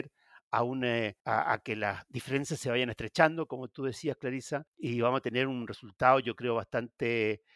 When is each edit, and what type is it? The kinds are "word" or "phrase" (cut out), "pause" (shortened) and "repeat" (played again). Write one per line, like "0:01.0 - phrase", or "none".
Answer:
0:01.2 - pause
0:04.7 - pause